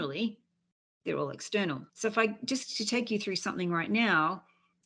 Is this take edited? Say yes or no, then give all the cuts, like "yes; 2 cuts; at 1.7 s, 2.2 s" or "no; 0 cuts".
yes; 1 cut; at 1.9 s